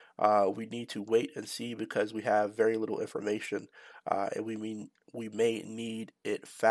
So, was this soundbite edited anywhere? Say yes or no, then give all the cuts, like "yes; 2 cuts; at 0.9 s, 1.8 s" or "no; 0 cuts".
no; 0 cuts